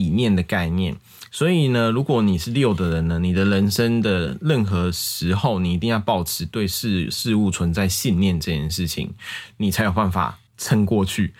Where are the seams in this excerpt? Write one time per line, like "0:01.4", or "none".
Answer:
0:10.5

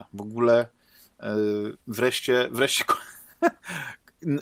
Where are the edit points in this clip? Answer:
0:01.8

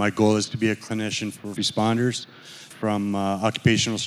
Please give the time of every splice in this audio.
0:01.6
0:02.7

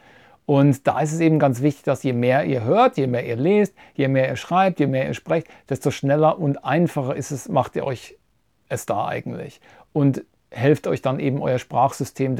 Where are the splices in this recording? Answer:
none

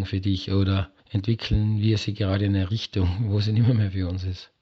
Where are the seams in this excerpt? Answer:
0:01.0

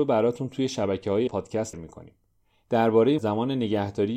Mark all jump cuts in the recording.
0:01.3
0:01.7
0:03.2

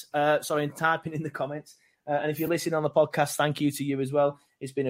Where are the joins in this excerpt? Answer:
none

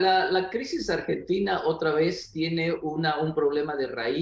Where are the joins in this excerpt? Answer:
none

